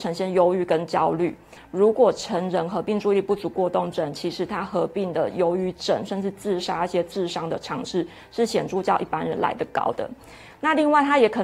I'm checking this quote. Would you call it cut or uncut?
uncut